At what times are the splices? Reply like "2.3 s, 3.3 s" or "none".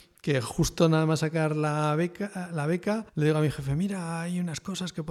3.1 s